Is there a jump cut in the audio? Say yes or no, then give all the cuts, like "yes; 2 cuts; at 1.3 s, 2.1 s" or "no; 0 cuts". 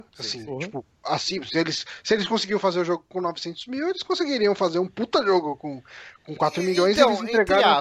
no; 0 cuts